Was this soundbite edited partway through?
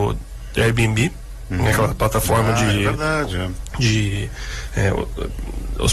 no; 0 cuts

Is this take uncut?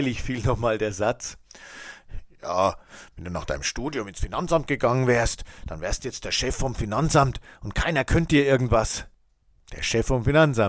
yes; 0 cuts

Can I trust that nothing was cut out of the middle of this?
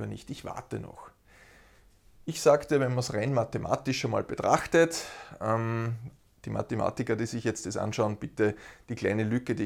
yes; 0 cuts

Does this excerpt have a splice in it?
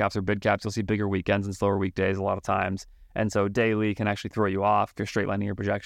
no; 0 cuts

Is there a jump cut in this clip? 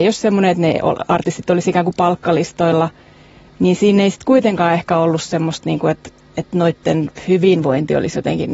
no; 0 cuts

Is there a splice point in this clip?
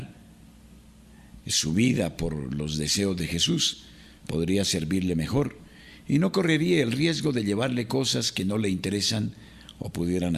no; 0 cuts

